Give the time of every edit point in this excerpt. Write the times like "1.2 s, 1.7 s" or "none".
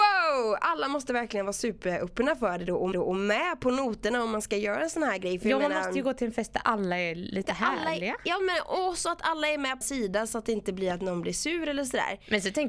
2.9 s, 9.8 s